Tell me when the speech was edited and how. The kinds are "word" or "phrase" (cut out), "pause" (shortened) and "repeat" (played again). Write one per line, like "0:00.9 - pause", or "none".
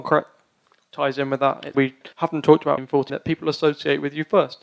0:01.7 - word
0:02.1 - pause
0:02.8 - word
0:03.1 - phrase